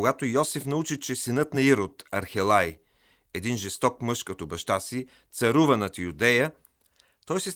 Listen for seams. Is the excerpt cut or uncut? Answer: uncut